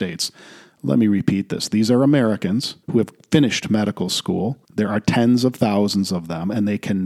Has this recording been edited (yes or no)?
yes